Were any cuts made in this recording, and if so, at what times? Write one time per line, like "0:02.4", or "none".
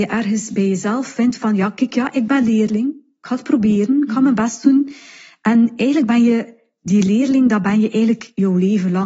none